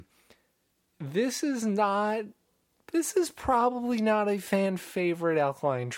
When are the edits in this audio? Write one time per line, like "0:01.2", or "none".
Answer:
none